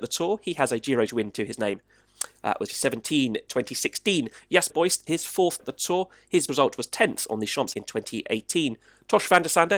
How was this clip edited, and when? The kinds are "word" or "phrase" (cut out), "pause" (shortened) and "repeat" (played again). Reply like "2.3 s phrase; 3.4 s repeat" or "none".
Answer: 1.1 s word; 2.7 s word; 3.5 s word; 4.7 s word; 5.1 s word; 5.6 s word; 6.5 s word; 7.7 s word